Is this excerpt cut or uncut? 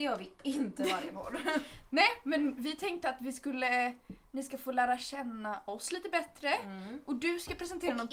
uncut